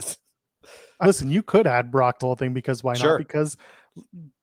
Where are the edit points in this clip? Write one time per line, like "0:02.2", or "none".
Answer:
0:01.0
0:02.2

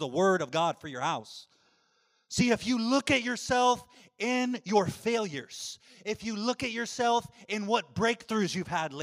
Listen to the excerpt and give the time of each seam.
none

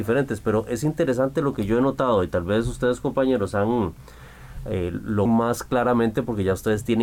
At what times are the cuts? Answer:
0:05.3

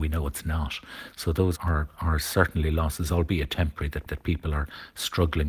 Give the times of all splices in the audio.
0:01.6
0:04.1

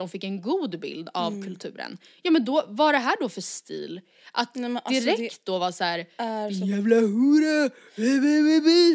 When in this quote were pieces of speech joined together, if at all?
none

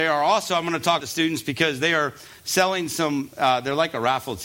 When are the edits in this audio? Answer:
0:01.0

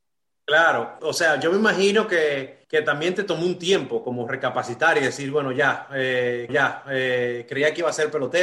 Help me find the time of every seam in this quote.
0:01.0
0:02.6
0:06.5

